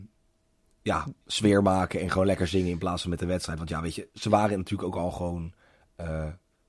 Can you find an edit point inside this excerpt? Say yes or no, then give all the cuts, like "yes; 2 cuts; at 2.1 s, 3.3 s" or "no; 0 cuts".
no; 0 cuts